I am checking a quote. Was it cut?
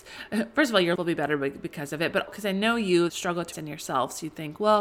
yes; 4 cuts; at 1.0 s, 2.3 s, 3.1 s, 3.5 s

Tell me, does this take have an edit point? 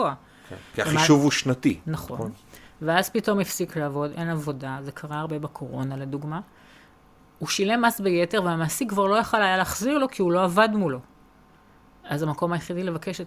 no; 0 cuts

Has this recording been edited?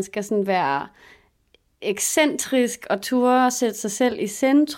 no; 0 cuts

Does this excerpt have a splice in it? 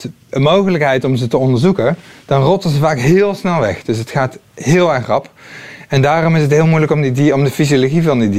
no; 0 cuts

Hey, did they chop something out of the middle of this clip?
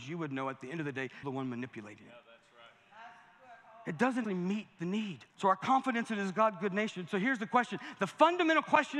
yes; 3 cuts; at 1.2 s, 4.2 s, 5.3 s

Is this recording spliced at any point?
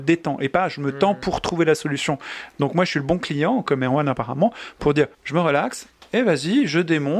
yes; 1 cut; at 5.1 s

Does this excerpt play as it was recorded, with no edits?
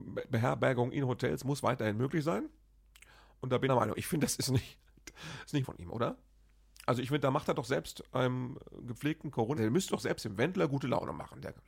no; 3 cuts; at 3.7 s, 5.6 s, 9.6 s

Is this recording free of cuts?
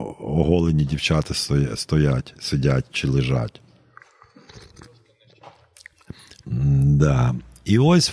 yes; 0 cuts

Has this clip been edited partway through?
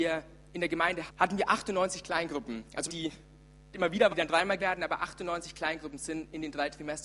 yes; 5 cuts; at 1.1 s, 2.9 s, 3.7 s, 4.1 s, 4.6 s

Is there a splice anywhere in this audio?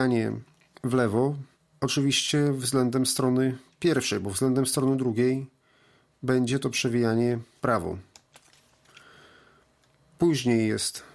yes; 1 cut; at 7.6 s

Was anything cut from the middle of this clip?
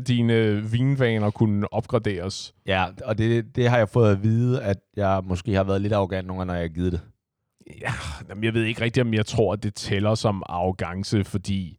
no; 0 cuts

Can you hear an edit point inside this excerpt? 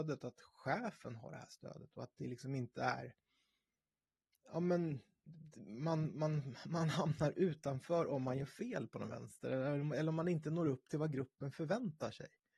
no; 0 cuts

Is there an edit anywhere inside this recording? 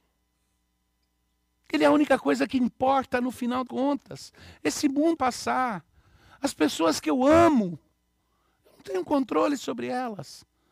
yes; 2 cuts; at 3.7 s, 5.2 s

